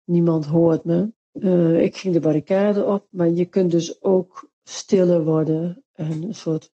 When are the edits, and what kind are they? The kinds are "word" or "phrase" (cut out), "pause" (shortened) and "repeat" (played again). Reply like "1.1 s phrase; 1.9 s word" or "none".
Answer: 1.2 s pause